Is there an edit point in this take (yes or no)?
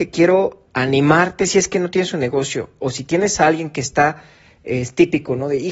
no